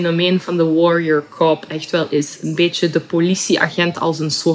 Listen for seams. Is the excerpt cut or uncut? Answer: cut